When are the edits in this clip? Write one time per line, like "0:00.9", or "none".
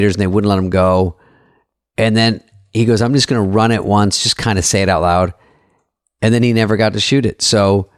none